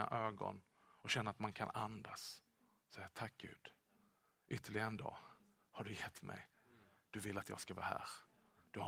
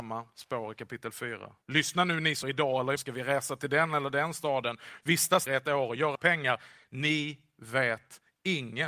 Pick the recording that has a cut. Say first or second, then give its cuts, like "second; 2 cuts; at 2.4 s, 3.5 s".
second; 5 cuts; at 1.6 s, 2.4 s, 3.0 s, 5.5 s, 6.2 s